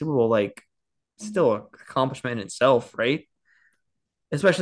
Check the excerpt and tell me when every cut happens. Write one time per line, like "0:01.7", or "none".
none